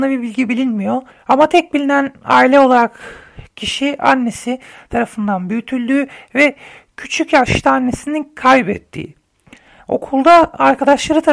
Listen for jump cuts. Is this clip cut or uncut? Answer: cut